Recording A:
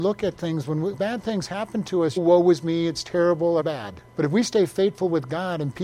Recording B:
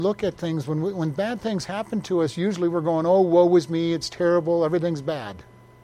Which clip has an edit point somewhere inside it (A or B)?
A